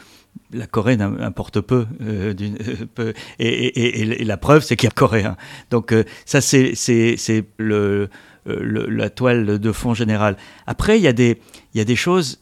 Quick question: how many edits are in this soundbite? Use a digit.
2